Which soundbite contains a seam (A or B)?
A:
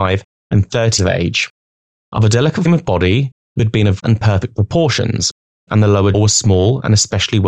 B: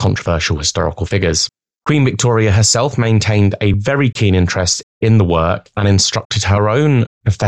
A